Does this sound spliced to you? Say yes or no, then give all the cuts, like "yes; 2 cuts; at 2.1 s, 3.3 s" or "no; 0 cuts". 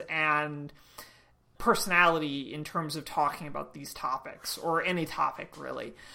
no; 0 cuts